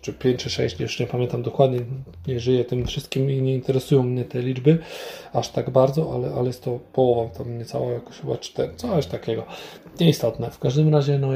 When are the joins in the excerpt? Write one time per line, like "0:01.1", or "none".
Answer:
none

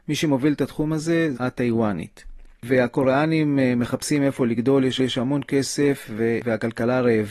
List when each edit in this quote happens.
0:01.3
0:02.5
0:05.0

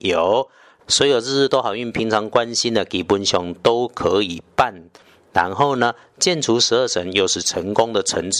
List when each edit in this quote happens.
none

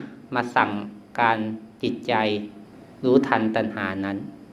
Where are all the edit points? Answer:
0:02.9

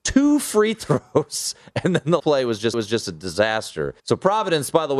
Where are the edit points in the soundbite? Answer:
0:02.2
0:02.7
0:04.0

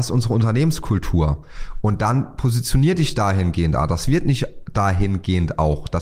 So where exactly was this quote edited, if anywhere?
none

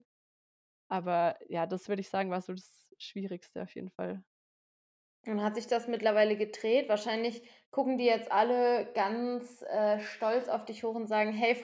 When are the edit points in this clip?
none

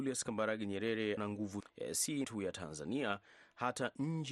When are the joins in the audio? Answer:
0:01.2
0:01.6
0:02.2

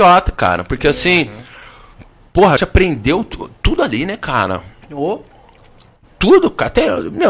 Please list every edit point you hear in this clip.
0:02.6

